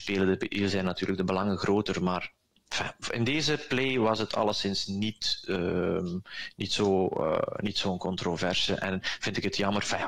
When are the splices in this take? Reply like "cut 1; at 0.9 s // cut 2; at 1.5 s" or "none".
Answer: none